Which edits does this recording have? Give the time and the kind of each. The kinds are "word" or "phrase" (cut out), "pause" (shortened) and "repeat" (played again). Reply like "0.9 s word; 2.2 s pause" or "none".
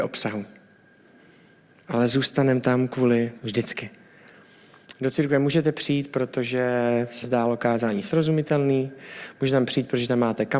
3.4 s word; 7.2 s word